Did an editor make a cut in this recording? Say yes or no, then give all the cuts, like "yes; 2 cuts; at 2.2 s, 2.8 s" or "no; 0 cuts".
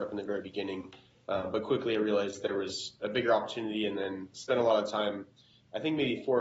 no; 0 cuts